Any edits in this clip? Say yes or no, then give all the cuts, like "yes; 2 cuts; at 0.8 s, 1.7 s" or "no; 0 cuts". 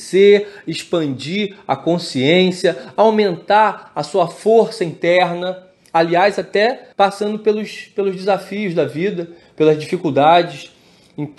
yes; 1 cut; at 6.9 s